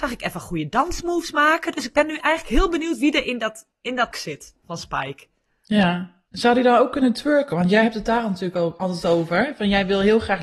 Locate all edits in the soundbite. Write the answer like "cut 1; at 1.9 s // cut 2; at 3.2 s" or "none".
cut 1; at 3.7 s // cut 2; at 4.1 s // cut 3; at 6.3 s